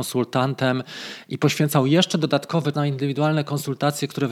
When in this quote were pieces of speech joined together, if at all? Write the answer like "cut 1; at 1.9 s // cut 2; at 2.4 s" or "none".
cut 1; at 2.7 s